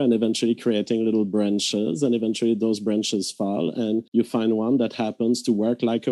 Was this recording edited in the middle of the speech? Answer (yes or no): yes